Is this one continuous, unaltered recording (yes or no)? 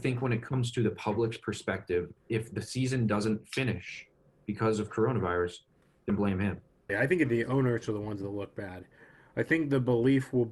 no